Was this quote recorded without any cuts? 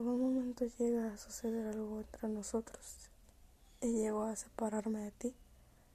yes; 0 cuts

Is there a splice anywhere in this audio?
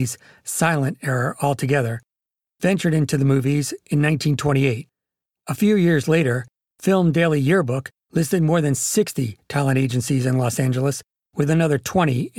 no; 0 cuts

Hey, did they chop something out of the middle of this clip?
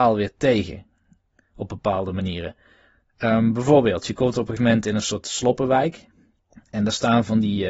yes; 1 cut; at 4.6 s

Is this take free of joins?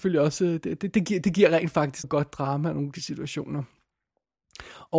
no; 2 cuts; at 2.0 s, 2.9 s

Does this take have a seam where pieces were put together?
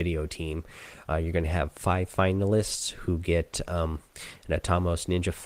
no; 0 cuts

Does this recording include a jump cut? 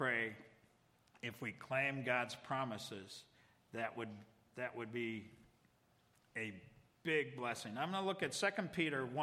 no; 0 cuts

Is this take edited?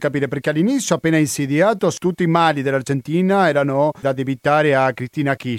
no; 0 cuts

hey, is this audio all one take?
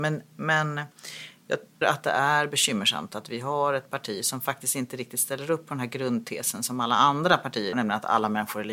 no; 2 cuts; at 1.8 s, 7.7 s

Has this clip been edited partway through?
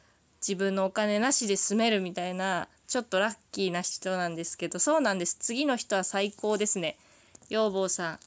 no; 0 cuts

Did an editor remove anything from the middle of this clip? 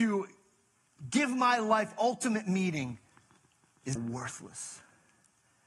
yes; 1 cut; at 4.0 s

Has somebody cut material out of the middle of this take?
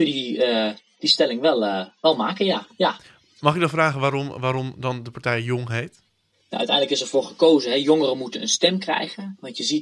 no; 0 cuts

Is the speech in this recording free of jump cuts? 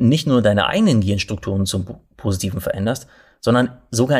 yes; 0 cuts

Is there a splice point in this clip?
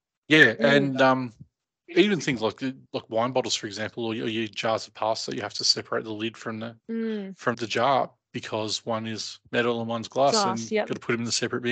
yes; 3 cuts; at 2.9 s, 6.8 s, 7.5 s

